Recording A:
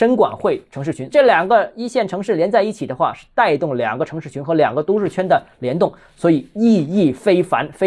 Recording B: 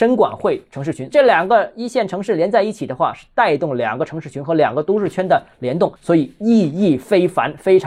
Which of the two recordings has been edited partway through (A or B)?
B